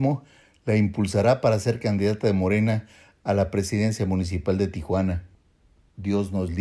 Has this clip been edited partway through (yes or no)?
no